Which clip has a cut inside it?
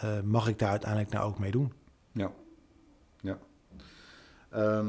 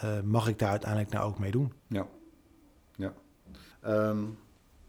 second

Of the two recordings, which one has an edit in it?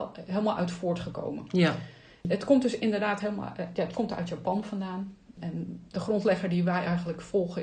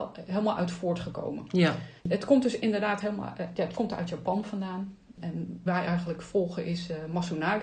second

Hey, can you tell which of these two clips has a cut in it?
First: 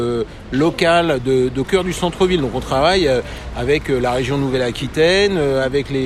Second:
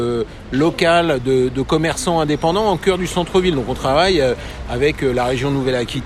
first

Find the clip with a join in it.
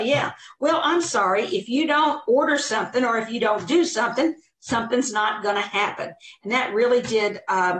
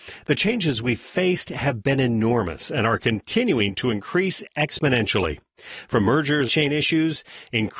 second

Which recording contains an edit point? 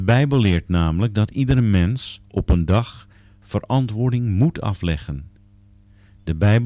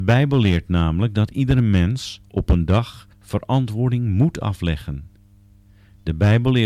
second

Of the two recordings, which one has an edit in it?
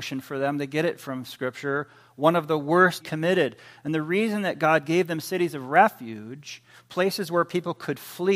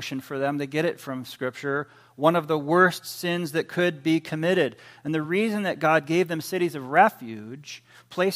first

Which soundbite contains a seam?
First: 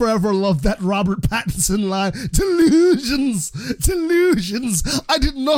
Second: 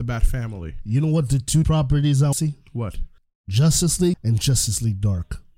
second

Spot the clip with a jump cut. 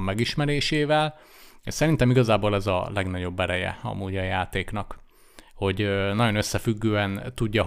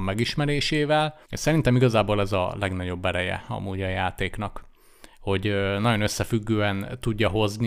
second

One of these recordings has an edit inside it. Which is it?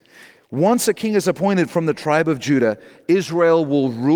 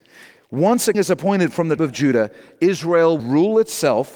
second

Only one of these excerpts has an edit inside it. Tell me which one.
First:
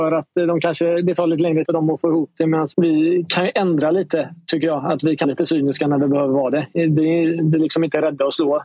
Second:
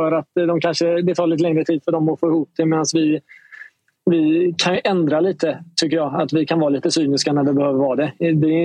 first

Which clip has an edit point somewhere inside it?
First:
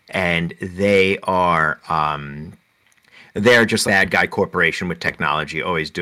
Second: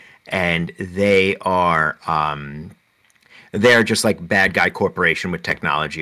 first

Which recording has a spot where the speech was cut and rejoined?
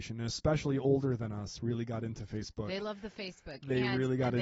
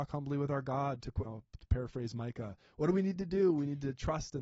second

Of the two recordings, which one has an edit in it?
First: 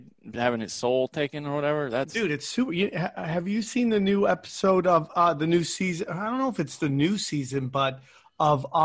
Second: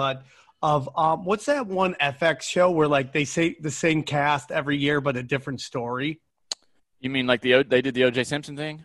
second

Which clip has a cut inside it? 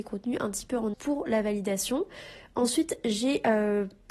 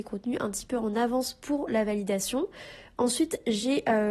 first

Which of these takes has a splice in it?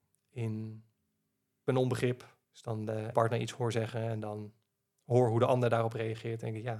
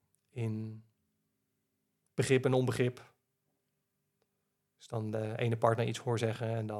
first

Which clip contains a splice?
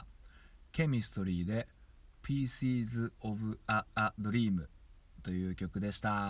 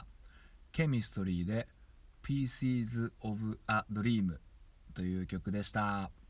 first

